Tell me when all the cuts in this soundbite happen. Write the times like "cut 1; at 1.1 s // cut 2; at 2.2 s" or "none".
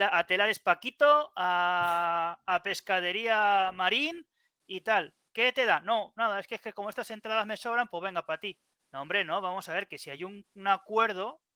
none